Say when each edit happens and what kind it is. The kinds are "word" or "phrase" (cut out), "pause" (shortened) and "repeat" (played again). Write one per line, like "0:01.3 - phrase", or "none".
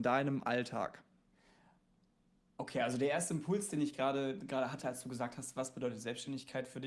none

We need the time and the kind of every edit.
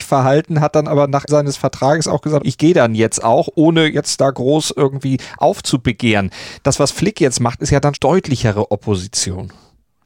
0:01.3 - word
0:02.4 - word
0:07.9 - word

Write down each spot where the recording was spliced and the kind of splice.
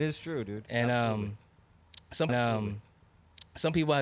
0:02.3 - repeat

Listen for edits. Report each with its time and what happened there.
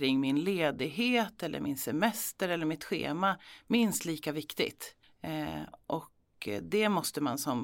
0:05.0 - pause

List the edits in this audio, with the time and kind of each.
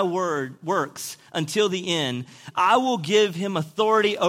none

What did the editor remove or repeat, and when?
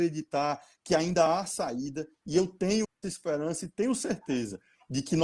0:02.8 - word

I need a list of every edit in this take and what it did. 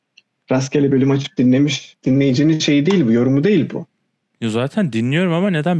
none

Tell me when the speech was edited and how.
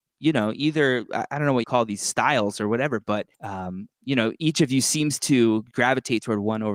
0:01.6 - phrase
0:03.3 - pause

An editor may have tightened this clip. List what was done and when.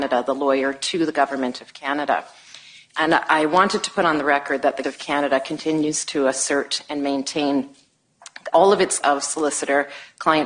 0:04.8 - word
0:08.5 - word
0:09.0 - word

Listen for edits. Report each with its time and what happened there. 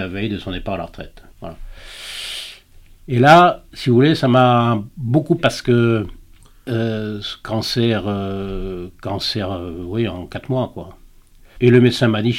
0:01.3 - pause
0:05.4 - word

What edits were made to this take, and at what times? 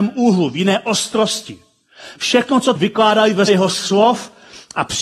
0:02.8 - word
0:03.5 - word

